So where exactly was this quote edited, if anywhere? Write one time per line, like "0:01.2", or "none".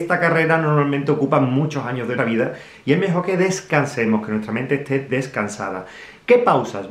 0:02.2